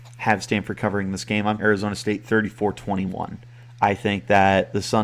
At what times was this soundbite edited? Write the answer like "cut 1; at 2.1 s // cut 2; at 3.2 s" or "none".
cut 1; at 1.6 s